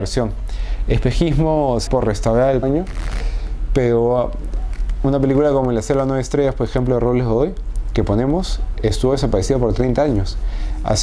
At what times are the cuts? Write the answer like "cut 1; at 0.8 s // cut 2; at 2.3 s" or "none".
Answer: cut 1; at 1.9 s // cut 2; at 2.6 s